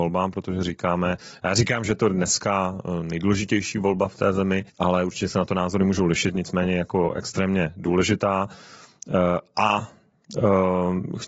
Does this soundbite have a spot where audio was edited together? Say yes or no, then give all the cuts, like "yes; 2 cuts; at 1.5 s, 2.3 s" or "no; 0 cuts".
yes; 1 cut; at 4.7 s